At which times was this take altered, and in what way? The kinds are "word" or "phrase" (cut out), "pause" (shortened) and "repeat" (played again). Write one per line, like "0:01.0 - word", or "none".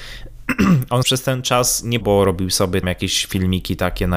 0:01.0 - phrase
0:02.0 - word
0:02.8 - word